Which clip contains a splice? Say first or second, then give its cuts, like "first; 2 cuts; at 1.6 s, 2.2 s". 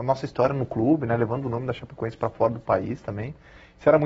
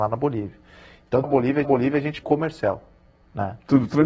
second; 3 cuts; at 1.2 s, 1.6 s, 2.2 s